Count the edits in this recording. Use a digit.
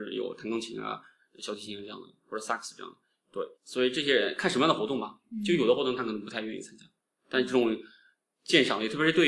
1